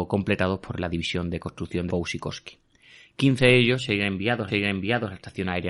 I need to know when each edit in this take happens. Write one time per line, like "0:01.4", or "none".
0:01.9
0:04.5